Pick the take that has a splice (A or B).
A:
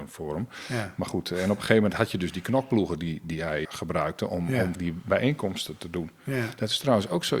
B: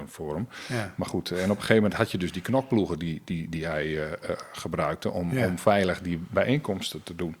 A